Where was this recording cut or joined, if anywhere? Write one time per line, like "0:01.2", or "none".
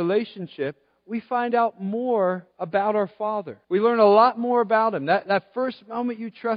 0:02.5
0:03.6